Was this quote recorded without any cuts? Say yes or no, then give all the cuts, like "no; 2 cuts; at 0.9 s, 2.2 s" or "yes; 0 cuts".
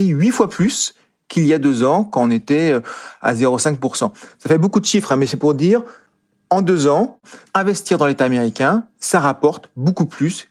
yes; 0 cuts